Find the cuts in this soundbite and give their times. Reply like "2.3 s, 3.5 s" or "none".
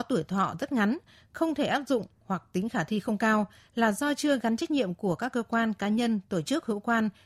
none